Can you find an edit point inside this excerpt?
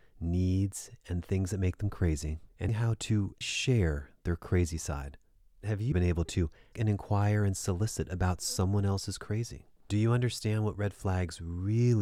yes; 4 cuts; at 2.7 s, 3.4 s, 5.9 s, 6.7 s

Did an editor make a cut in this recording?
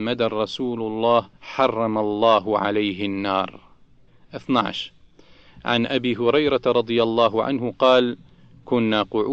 yes; 2 cuts; at 1.4 s, 4.1 s

